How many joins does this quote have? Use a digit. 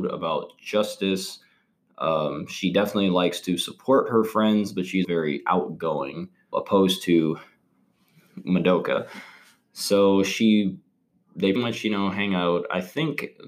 3